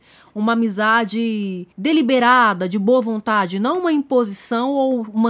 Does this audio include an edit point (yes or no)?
yes